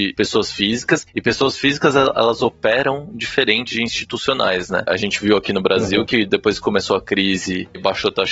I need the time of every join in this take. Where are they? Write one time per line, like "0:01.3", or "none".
none